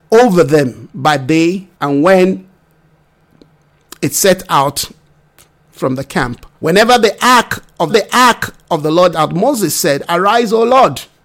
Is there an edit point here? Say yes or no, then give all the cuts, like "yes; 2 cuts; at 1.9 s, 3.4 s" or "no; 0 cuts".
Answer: yes; 4 cuts; at 1.7 s, 6.5 s, 7.9 s, 9.1 s